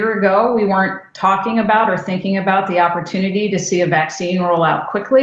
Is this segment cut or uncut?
uncut